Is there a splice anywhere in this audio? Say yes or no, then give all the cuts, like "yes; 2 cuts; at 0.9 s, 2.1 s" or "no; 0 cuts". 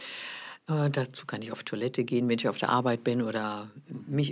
no; 0 cuts